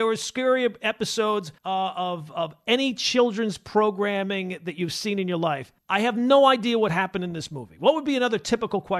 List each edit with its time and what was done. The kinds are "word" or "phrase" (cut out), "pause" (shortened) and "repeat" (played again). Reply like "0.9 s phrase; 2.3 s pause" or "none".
1.6 s pause; 5.8 s pause